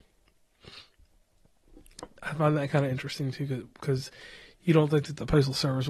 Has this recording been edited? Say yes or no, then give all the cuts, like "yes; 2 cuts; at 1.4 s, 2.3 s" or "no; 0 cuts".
no; 0 cuts